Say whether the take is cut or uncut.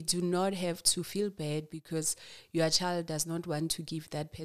uncut